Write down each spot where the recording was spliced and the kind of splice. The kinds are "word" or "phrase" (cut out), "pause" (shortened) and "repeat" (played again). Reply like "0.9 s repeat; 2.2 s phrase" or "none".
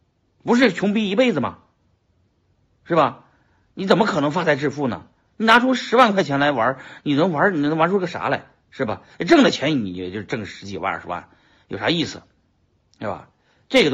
none